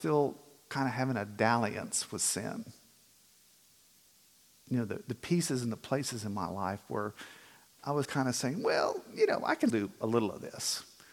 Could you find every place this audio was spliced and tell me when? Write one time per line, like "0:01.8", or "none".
0:08.0
0:09.7

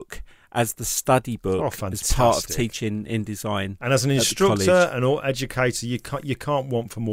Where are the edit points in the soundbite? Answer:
none

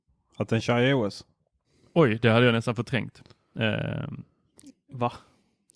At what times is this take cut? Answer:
none

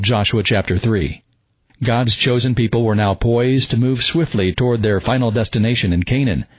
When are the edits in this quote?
none

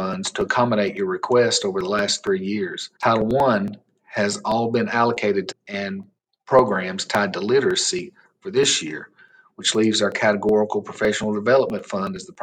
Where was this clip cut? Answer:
0:03.0
0:05.5

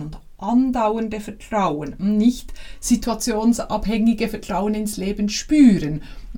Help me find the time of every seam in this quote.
none

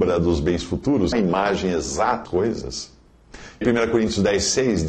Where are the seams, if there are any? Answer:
0:01.1
0:02.3
0:03.6

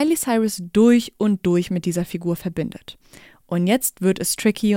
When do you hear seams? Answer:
none

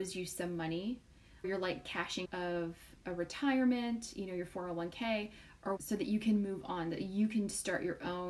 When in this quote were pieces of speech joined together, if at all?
0:01.4
0:02.2
0:05.8

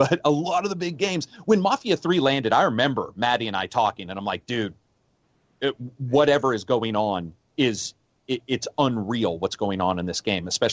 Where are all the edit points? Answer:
none

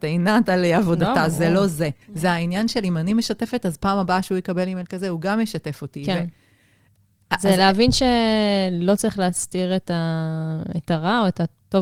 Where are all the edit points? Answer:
0:02.0

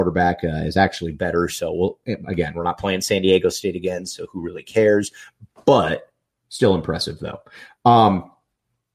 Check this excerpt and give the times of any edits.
none

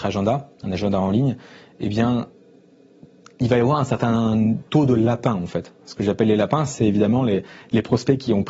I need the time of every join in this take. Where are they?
0:04.7

